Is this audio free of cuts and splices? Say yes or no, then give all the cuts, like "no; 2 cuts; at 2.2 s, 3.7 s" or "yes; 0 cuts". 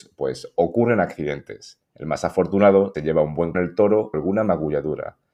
no; 4 cuts; at 1.9 s, 2.9 s, 3.5 s, 4.1 s